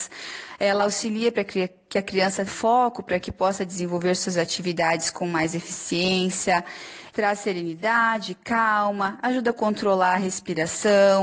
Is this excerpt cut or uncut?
cut